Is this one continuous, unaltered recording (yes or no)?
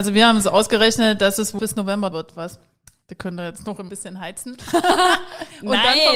no